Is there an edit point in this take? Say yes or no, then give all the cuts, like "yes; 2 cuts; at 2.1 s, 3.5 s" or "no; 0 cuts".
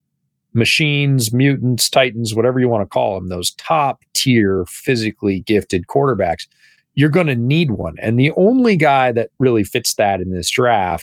no; 0 cuts